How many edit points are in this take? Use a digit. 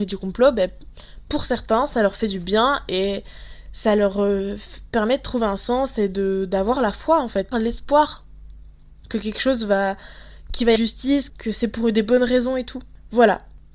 3